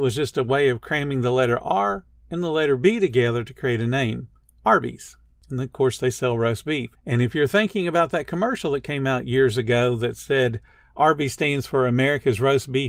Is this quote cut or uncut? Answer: uncut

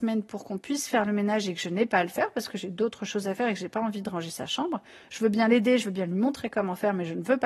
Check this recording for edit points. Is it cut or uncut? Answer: uncut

